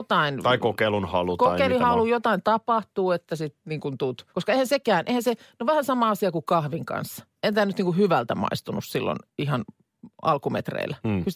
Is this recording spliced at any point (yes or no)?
yes